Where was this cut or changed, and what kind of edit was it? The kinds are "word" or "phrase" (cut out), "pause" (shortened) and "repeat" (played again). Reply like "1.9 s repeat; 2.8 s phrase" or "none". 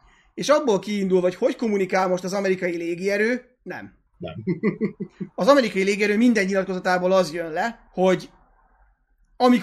4.1 s pause; 7.9 s pause